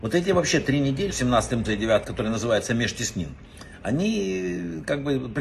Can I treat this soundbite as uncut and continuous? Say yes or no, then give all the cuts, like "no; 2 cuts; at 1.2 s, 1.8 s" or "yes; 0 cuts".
no; 3 cuts; at 1.1 s, 1.6 s, 2.0 s